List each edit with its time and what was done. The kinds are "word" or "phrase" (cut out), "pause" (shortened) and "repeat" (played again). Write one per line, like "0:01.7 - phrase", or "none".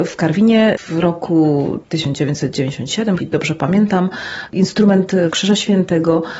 0:03.2 - phrase
0:05.3 - phrase